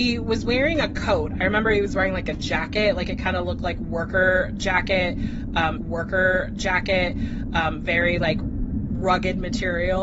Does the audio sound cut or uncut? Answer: cut